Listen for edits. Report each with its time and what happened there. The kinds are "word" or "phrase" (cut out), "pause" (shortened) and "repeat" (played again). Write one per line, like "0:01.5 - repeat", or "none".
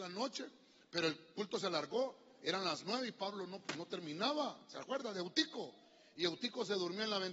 none